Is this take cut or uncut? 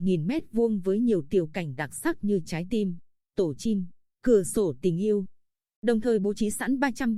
uncut